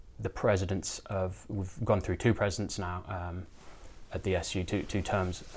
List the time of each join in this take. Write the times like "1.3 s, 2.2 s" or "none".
none